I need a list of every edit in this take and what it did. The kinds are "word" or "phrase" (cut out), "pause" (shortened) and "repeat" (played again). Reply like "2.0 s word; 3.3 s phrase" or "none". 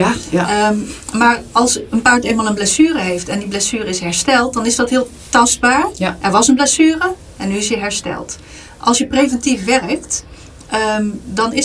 none